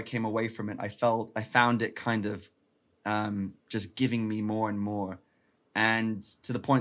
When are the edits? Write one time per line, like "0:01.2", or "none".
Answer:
none